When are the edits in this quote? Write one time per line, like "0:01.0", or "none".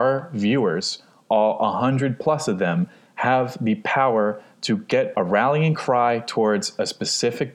none